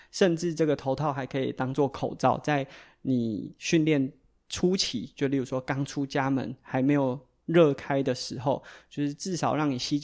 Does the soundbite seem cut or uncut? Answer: uncut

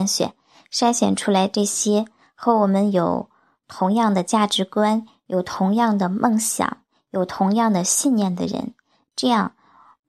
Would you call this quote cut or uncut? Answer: uncut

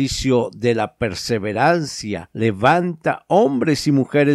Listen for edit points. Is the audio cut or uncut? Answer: uncut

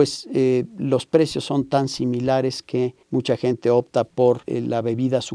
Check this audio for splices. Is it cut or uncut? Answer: cut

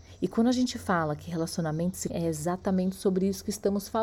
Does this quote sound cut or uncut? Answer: cut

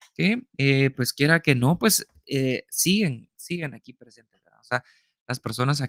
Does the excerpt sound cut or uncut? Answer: uncut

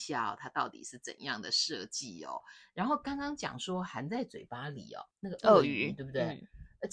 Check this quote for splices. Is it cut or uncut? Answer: cut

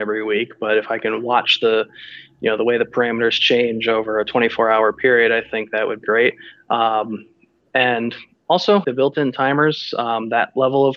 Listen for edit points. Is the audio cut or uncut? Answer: cut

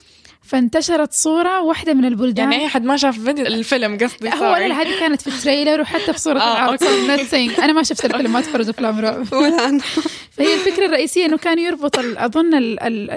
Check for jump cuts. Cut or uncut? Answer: cut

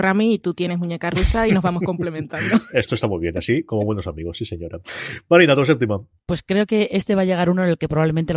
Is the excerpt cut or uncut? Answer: cut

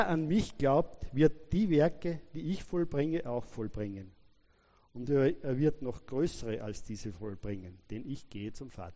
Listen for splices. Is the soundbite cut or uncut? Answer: uncut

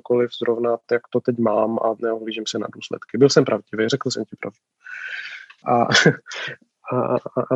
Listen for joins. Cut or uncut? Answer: uncut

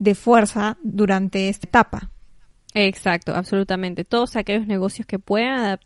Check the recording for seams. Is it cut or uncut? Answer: cut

